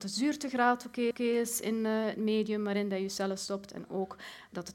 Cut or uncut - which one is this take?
cut